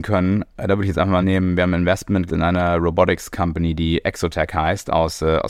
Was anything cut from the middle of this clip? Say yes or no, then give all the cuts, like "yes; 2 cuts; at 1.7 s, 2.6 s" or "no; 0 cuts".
yes; 2 cuts; at 1.2 s, 2.3 s